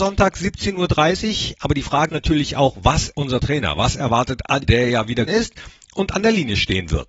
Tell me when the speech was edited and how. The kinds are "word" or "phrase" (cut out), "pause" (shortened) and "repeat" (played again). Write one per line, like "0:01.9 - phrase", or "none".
0:02.1 - word
0:03.1 - word
0:04.6 - word
0:05.3 - word